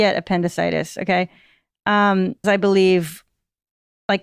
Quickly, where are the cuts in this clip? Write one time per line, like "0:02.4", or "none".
0:02.4